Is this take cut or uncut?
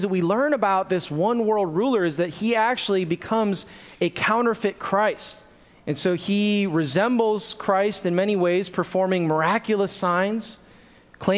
cut